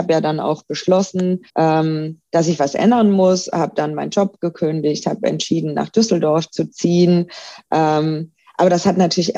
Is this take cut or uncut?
cut